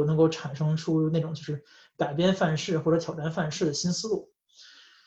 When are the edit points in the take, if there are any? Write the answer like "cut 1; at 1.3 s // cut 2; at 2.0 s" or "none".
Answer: none